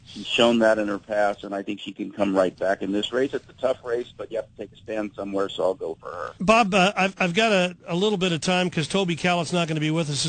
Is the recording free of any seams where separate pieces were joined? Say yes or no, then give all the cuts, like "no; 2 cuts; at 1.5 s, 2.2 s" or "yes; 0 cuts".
no; 1 cut; at 6.4 s